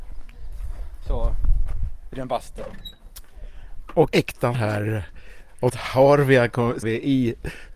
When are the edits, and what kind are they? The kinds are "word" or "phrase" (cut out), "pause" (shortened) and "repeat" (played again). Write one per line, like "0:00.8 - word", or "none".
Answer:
0:02.1 - word
0:04.1 - word
0:04.5 - word
0:05.7 - word
0:06.8 - word